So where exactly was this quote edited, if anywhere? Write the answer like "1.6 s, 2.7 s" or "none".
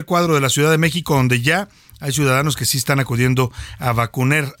none